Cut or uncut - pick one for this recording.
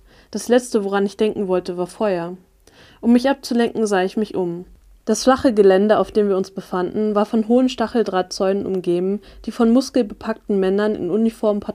uncut